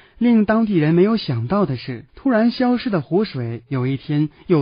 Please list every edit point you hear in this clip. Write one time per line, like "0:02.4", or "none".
0:02.1